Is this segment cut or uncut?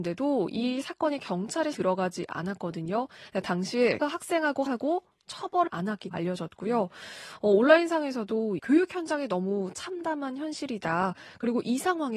cut